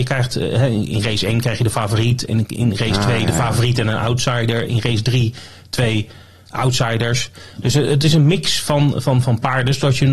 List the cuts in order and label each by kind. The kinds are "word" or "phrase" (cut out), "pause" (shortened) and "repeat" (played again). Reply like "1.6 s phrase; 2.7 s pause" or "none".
none